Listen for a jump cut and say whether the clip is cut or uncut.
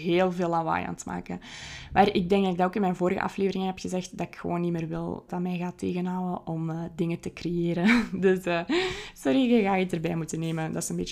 cut